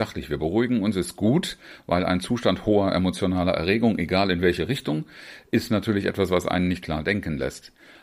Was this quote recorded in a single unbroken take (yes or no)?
yes